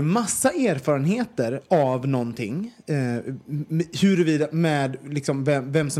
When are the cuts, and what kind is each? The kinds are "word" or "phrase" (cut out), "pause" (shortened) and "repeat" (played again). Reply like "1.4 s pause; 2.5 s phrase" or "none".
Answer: none